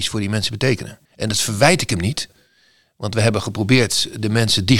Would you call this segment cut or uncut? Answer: cut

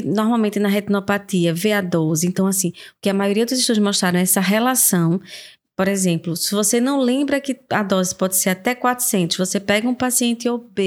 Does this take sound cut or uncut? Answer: uncut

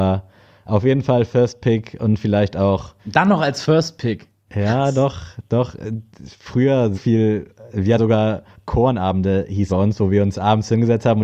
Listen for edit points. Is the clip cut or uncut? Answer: cut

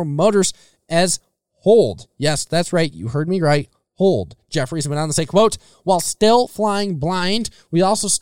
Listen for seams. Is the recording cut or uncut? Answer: uncut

